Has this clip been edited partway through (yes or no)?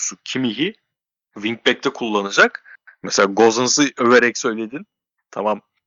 no